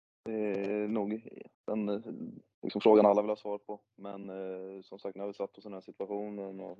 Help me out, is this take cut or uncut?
cut